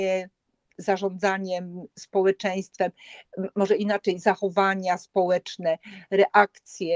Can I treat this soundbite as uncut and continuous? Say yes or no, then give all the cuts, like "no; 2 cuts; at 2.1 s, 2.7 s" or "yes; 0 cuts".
yes; 0 cuts